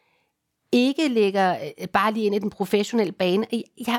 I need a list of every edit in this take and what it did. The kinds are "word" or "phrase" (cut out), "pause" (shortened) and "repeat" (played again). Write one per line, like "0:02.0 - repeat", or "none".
none